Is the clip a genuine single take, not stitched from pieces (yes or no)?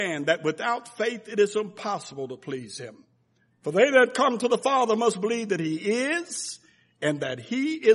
yes